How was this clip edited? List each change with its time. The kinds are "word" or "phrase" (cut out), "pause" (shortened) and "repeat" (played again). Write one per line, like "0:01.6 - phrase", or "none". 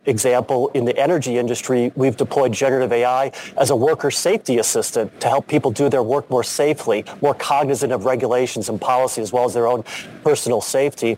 none